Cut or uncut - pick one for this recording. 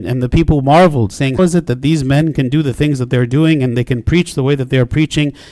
cut